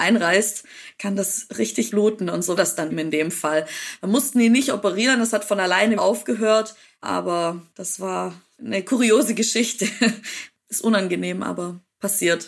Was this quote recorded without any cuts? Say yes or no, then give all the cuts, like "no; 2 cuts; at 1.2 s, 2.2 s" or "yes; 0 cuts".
no; 4 cuts; at 1.9 s, 2.6 s, 2.9 s, 6.0 s